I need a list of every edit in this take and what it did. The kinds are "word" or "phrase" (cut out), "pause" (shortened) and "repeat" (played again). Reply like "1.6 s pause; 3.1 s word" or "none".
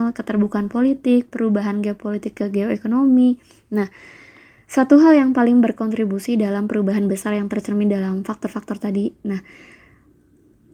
none